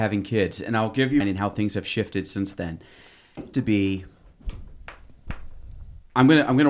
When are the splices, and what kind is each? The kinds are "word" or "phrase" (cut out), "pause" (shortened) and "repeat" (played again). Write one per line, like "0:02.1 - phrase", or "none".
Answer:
0:01.2 - phrase
0:03.5 - phrase